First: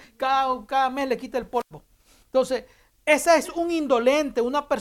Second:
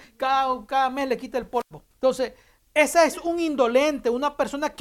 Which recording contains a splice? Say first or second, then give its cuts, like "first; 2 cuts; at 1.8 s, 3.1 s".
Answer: second; 1 cut; at 1.9 s